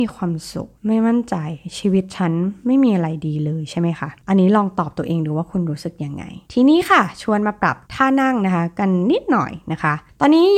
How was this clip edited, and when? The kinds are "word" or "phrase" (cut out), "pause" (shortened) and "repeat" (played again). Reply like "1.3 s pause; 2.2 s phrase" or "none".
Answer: 4.2 s pause; 6.4 s pause; 7.8 s pause